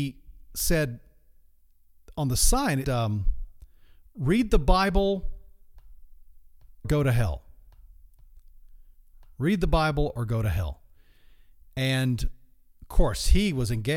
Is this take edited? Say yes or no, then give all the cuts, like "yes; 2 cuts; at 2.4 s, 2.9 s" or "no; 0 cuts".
yes; 2 cuts; at 2.8 s, 6.8 s